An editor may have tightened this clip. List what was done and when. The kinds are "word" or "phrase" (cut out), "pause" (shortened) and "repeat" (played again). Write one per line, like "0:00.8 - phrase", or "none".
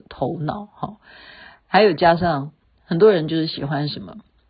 0:02.6 - pause